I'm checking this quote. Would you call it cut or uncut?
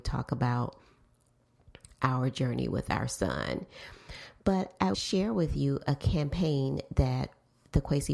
cut